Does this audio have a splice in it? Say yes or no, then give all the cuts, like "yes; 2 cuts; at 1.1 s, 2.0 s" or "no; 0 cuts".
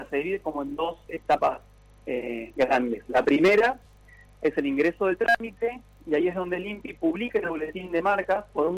no; 0 cuts